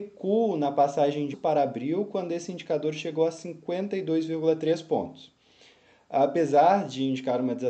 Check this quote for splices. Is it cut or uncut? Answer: cut